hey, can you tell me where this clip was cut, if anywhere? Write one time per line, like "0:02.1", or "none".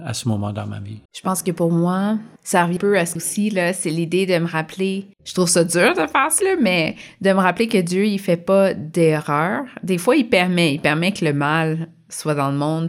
0:01.1
0:02.4
0:02.8
0:03.2
0:05.1
0:06.4